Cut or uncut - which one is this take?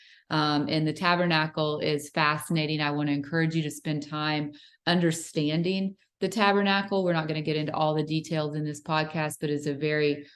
uncut